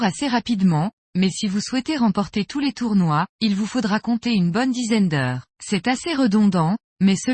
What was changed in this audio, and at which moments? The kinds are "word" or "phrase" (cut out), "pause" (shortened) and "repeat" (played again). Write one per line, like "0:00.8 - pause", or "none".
0:03.3 - pause
0:05.5 - pause